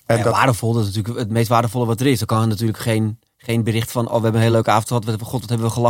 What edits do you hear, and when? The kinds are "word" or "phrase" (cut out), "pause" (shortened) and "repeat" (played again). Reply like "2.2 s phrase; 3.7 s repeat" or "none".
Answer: none